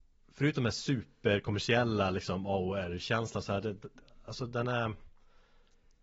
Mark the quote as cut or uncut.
uncut